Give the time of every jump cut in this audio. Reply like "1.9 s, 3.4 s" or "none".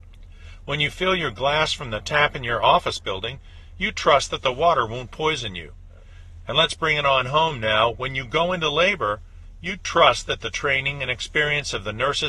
none